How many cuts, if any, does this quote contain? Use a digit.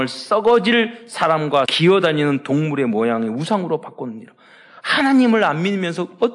1